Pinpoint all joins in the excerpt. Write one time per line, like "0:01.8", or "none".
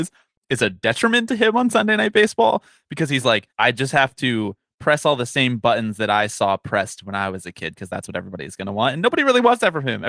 0:03.5